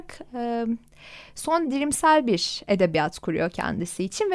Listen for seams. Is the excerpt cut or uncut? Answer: cut